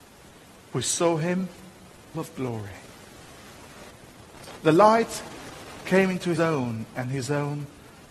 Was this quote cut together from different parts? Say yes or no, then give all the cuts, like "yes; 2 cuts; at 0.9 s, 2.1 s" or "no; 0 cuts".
yes; 2 cuts; at 2.1 s, 6.4 s